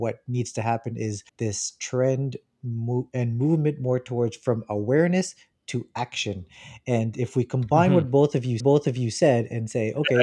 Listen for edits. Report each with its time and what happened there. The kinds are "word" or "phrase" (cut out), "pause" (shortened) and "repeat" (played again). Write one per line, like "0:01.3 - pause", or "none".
0:01.3 - pause
0:08.6 - repeat